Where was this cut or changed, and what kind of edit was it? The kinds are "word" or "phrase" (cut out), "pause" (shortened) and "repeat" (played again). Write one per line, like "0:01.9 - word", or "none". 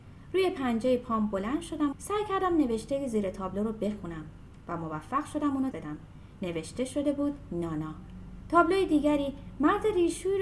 0:01.9 - word
0:05.7 - word